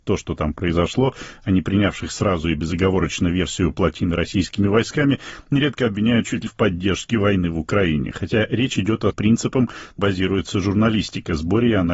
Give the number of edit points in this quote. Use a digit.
4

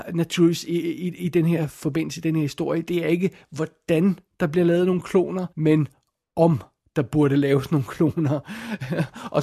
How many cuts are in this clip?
1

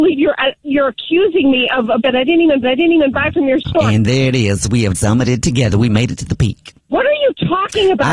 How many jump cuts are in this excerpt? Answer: 4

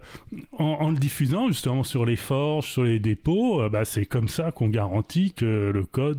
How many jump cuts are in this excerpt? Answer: 0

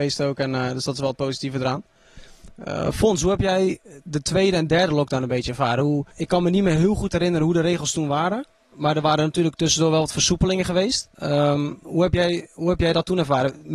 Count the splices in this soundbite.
2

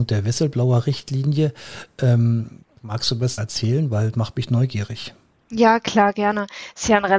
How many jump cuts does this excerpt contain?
3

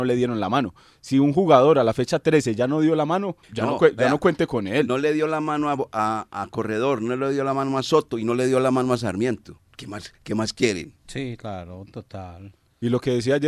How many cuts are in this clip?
2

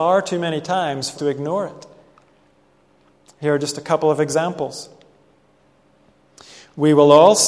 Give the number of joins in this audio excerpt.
1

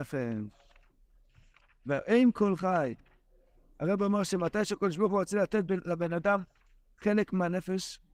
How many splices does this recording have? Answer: 0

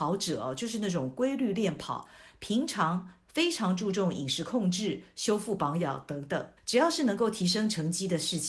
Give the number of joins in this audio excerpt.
1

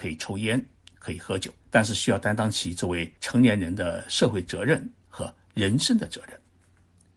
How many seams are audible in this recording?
2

